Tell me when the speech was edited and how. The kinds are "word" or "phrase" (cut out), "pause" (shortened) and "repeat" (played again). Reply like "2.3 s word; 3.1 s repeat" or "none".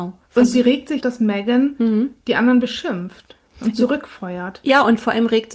1.0 s phrase